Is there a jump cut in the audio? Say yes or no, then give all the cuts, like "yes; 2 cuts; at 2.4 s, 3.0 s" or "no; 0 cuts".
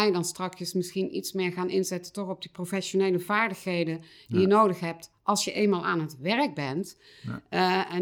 no; 0 cuts